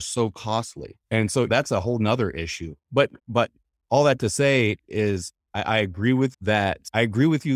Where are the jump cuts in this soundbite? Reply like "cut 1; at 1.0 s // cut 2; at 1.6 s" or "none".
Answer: cut 1; at 1.0 s // cut 2; at 1.5 s // cut 3; at 3.2 s // cut 4; at 6.3 s